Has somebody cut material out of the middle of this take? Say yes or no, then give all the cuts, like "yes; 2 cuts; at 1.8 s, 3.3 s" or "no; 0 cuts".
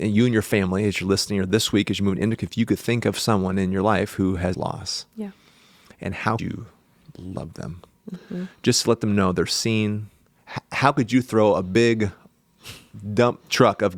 yes; 3 cuts; at 2.4 s, 4.5 s, 6.4 s